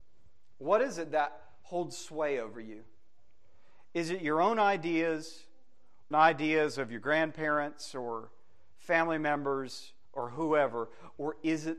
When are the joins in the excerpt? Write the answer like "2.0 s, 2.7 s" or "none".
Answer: 6.1 s